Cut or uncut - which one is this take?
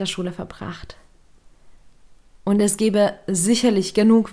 uncut